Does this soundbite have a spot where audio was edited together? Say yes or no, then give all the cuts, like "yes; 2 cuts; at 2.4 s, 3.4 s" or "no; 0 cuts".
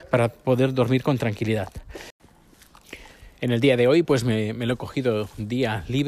no; 0 cuts